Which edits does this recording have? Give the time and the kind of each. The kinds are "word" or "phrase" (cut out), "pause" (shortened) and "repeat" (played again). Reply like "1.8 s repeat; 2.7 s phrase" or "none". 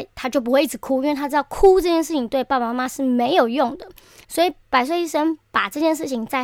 4.2 s pause